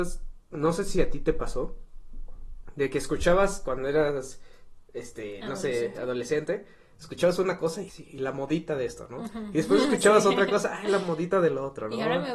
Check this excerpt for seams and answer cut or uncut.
cut